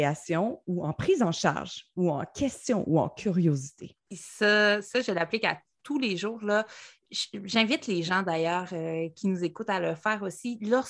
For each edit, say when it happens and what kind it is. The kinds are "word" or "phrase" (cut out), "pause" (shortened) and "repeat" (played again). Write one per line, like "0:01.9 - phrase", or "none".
none